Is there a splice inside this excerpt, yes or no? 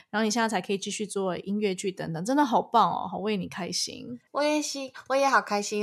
yes